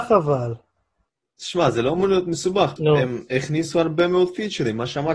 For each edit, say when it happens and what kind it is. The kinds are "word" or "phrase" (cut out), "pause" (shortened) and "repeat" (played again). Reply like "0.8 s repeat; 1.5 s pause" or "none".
1.1 s pause; 2.8 s word